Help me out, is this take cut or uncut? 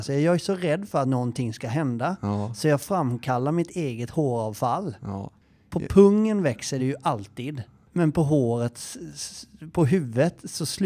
uncut